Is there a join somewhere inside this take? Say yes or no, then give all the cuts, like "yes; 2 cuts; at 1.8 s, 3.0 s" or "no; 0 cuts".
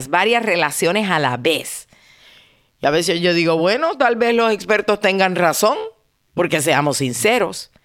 no; 0 cuts